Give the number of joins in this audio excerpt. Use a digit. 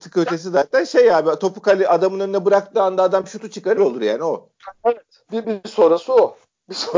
2